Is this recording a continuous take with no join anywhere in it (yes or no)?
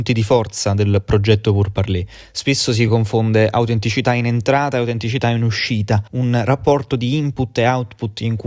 yes